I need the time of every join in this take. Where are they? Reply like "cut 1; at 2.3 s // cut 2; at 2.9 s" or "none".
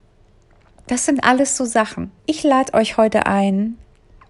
cut 1; at 2.2 s